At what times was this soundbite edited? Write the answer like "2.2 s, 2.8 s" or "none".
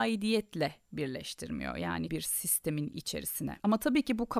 2.1 s

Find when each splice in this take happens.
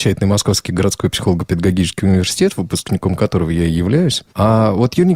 none

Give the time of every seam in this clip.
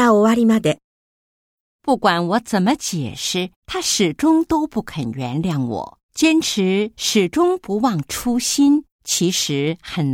3.6 s, 6.1 s, 8.9 s

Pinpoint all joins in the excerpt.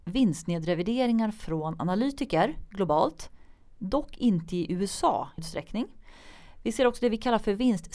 5.4 s

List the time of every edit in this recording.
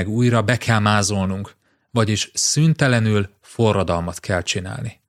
none

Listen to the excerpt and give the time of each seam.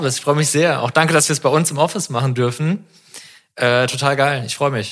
none

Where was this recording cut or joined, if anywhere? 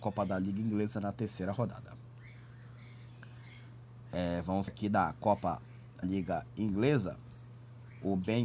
4.7 s, 6.0 s

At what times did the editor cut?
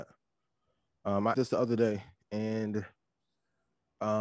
1.3 s

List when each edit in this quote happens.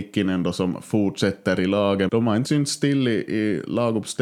2.1 s, 2.4 s

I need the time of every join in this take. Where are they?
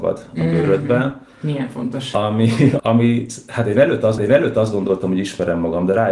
2.8 s, 4.2 s

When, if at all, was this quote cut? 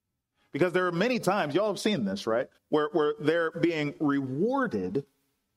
2.6 s

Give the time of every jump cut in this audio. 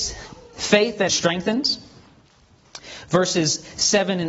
1.1 s

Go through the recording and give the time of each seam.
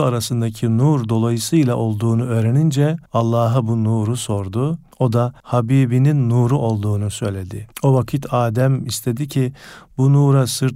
3.1 s, 4.9 s, 5.4 s, 7.7 s

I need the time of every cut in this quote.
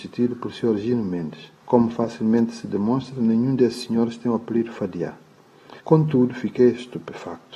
1.6 s, 5.8 s

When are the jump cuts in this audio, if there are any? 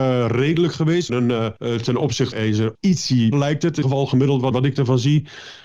1.1 s, 1.6 s, 2.3 s, 2.7 s, 3.3 s, 3.8 s, 4.5 s

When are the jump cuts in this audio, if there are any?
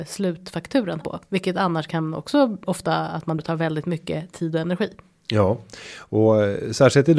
1.0 s, 2.6 s, 3.4 s

